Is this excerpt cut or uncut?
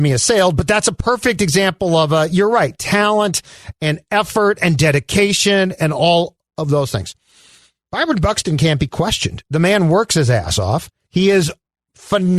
uncut